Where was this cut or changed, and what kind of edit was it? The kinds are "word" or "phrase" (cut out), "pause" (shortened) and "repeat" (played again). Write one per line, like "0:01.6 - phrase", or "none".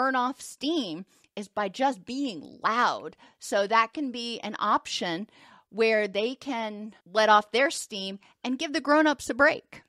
0:07.0 - pause